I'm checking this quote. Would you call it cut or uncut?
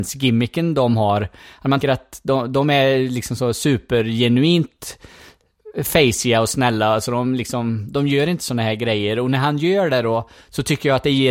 cut